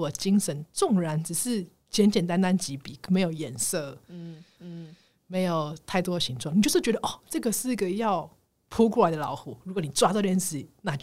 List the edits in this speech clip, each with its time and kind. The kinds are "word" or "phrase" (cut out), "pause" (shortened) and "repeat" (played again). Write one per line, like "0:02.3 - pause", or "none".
0:04.6 - repeat